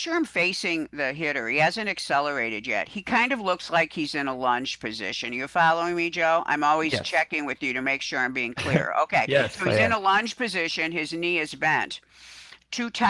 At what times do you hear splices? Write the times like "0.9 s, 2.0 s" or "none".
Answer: none